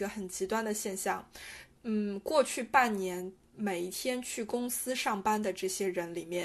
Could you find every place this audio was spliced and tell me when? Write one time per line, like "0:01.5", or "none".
0:01.7